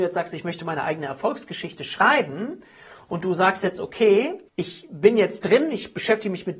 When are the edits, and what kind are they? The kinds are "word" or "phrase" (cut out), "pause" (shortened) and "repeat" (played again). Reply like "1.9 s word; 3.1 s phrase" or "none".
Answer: 4.5 s pause